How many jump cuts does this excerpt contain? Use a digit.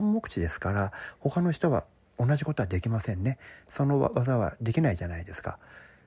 0